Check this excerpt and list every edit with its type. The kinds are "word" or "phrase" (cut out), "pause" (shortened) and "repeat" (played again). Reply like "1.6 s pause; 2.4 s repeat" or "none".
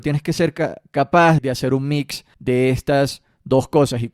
1.4 s word; 2.3 s pause

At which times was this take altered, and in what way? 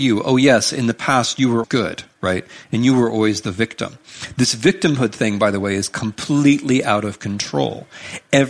1.6 s word

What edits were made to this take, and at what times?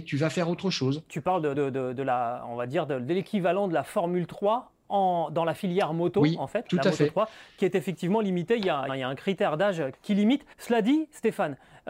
1.5 s word; 6.7 s word; 8.9 s phrase; 9.9 s word; 10.5 s pause

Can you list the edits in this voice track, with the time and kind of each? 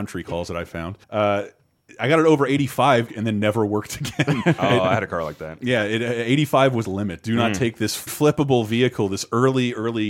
1.0 s pause; 3.1 s phrase; 4.6 s word; 6.8 s word; 8.1 s word

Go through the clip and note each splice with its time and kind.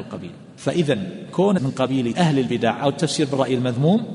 1.6 s word; 2.1 s word

